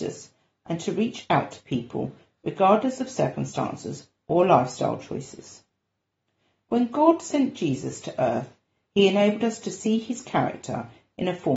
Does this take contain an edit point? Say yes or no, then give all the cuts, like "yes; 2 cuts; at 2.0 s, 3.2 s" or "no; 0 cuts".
no; 0 cuts